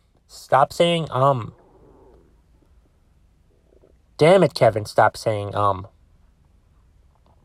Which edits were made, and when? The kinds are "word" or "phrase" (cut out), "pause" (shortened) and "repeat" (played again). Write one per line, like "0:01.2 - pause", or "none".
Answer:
none